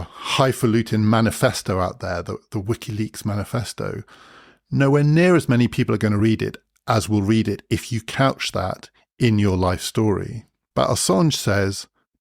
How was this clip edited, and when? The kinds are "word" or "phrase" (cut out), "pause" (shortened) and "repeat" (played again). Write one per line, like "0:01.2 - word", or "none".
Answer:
none